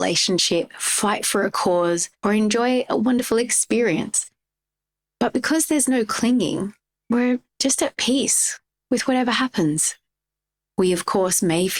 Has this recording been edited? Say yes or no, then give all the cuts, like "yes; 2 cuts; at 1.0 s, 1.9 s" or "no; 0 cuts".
yes; 2 cuts; at 2.2 s, 7.0 s